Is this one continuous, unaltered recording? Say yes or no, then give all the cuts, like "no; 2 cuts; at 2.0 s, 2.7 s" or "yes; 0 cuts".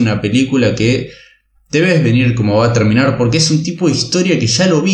yes; 0 cuts